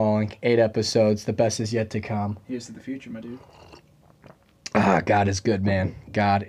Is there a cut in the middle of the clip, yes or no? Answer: no